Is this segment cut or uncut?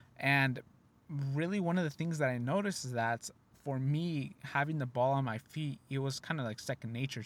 uncut